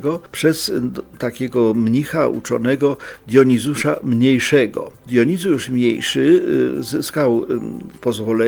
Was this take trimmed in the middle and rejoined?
no; 0 cuts

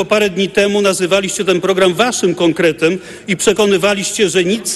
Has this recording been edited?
no; 0 cuts

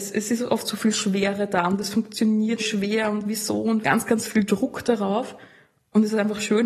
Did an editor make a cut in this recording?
yes; 2 cuts; at 2.6 s, 3.8 s

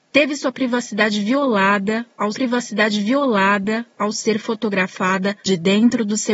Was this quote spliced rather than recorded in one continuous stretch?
yes; 2 cuts; at 2.3 s, 5.4 s

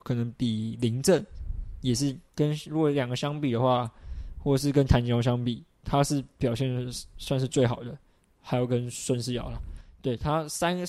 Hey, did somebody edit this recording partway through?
no; 0 cuts

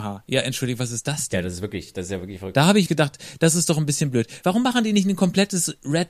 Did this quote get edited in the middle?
yes; 1 cut; at 2.9 s

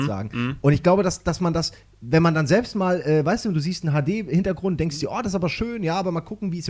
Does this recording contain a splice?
no; 0 cuts

